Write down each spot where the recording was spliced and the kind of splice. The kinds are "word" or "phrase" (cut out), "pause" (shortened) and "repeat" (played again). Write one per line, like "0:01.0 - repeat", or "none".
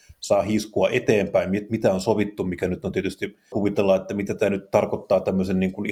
0:03.5 - phrase